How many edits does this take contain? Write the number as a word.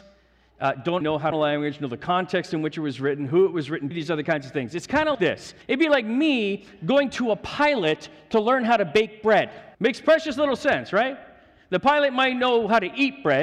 six